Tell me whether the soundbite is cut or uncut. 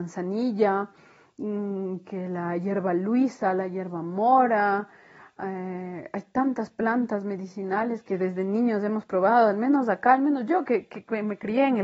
uncut